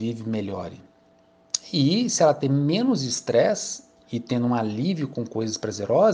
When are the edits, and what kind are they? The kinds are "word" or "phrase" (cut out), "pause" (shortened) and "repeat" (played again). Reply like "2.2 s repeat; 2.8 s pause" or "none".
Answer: none